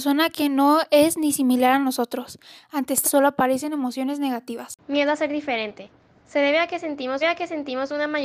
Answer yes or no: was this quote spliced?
yes